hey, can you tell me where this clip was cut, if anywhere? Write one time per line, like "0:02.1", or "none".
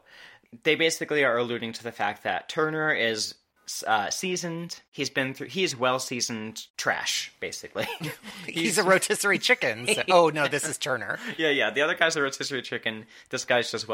0:04.9
0:06.7